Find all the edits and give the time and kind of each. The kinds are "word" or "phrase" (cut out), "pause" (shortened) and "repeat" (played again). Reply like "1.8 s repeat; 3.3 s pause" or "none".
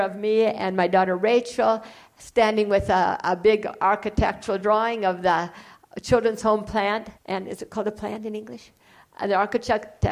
7.2 s pause